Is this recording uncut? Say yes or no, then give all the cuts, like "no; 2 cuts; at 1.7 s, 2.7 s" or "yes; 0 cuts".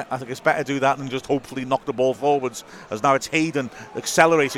yes; 0 cuts